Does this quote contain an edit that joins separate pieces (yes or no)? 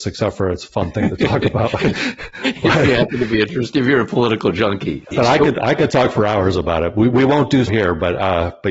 yes